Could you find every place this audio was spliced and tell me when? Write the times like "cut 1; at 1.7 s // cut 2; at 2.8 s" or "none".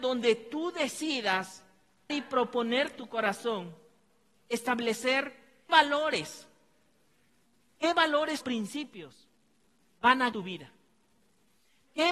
cut 1; at 2.1 s // cut 2; at 3.0 s // cut 3; at 5.7 s // cut 4; at 8.4 s // cut 5; at 10.3 s